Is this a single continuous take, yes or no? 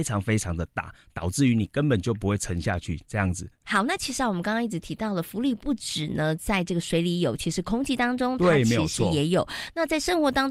yes